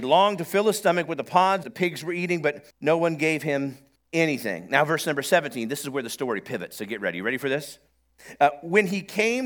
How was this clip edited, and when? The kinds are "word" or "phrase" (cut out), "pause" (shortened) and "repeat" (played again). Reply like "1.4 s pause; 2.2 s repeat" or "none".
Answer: 1.6 s phrase; 2.7 s pause; 4.0 s pause